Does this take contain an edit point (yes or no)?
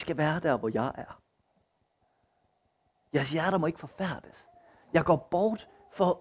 no